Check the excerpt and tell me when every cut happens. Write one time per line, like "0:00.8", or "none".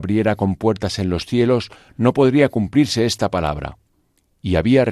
none